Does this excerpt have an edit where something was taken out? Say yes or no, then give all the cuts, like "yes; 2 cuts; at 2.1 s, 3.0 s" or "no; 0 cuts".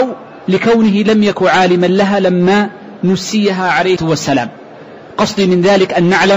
yes; 1 cut; at 4.0 s